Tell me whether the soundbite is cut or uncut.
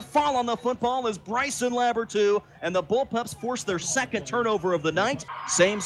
uncut